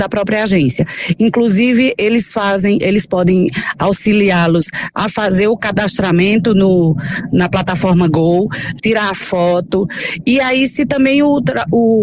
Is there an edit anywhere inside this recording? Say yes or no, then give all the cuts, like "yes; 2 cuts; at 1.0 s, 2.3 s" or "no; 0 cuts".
yes; 1 cut; at 8.8 s